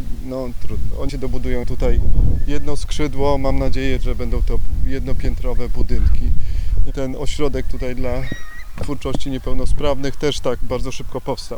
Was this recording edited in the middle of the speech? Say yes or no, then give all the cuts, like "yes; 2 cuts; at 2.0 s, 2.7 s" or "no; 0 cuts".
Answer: yes; 3 cuts; at 1.1 s, 1.6 s, 4.0 s